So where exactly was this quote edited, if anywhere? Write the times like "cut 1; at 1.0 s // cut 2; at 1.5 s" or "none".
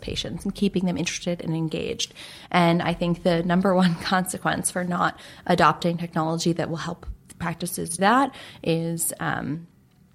cut 1; at 8.0 s